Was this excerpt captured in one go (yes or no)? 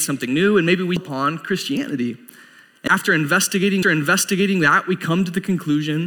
no